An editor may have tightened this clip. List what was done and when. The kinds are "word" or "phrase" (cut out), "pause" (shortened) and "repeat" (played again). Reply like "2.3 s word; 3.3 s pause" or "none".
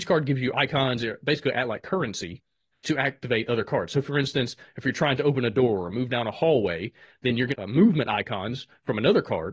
7.5 s phrase